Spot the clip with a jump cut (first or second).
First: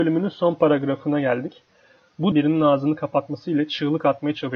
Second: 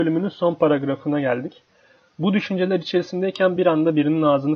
first